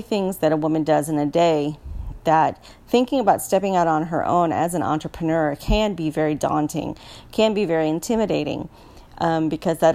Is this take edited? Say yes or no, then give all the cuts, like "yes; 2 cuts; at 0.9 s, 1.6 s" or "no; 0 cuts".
no; 0 cuts